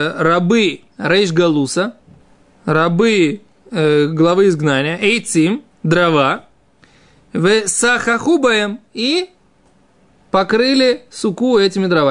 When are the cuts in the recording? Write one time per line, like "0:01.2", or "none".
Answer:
0:00.9
0:02.2
0:05.7